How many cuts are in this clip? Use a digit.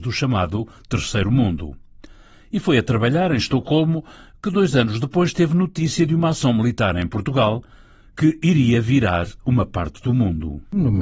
0